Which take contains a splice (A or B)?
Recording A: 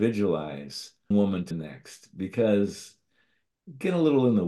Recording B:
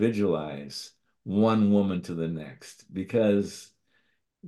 A